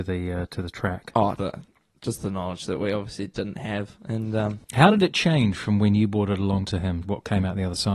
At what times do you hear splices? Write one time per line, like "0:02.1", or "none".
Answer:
0:01.4
0:04.6
0:07.0